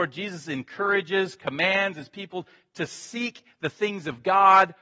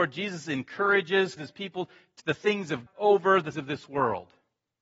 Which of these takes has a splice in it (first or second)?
second